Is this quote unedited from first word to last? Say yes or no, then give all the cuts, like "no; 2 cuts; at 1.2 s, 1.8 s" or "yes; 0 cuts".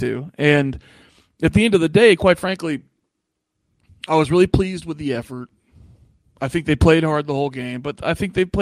yes; 0 cuts